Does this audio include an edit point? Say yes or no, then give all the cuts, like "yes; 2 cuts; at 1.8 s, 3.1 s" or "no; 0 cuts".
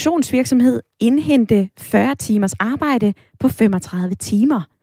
no; 0 cuts